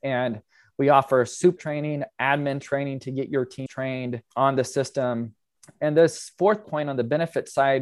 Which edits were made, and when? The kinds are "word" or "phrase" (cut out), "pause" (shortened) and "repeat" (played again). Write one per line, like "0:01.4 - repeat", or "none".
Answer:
0:01.6 - word
0:03.7 - word
0:04.3 - word
0:05.5 - pause
0:06.6 - word